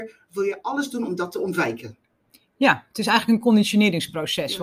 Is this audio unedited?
yes; 0 cuts

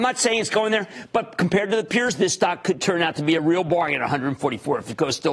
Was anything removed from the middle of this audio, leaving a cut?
no; 0 cuts

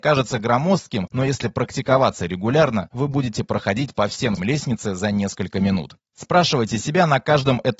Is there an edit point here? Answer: yes; 1 cut; at 4.4 s

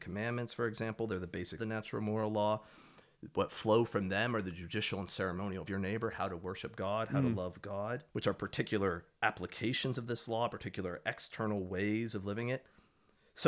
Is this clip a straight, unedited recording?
no; 2 cuts; at 1.6 s, 5.7 s

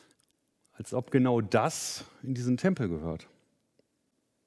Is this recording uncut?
yes; 0 cuts

